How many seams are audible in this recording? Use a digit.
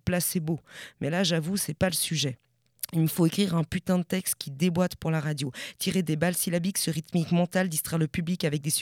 0